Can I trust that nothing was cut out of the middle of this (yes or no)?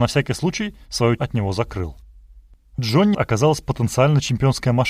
no